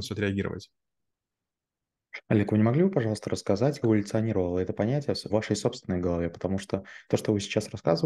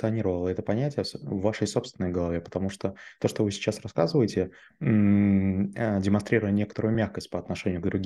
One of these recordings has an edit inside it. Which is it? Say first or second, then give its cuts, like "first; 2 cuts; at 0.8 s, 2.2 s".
first; 2 cuts; at 3.8 s, 5.3 s